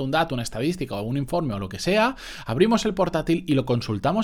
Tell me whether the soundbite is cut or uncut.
uncut